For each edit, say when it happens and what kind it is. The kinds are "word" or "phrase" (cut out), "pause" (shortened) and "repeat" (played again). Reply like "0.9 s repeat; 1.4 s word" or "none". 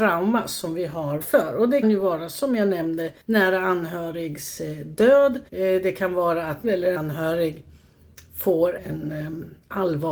1.2 s phrase; 1.8 s word; 3.2 s pause; 5.5 s pause; 6.6 s phrase; 7.0 s word; 8.8 s word